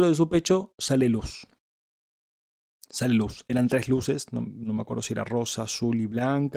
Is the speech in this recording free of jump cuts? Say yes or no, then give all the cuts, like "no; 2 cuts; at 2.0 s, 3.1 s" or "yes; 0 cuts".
yes; 0 cuts